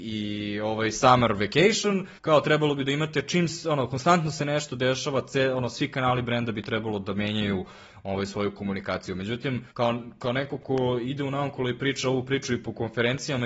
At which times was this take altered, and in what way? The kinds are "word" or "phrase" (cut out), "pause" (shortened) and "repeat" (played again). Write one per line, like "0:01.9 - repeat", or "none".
0:02.2 - pause
0:09.7 - pause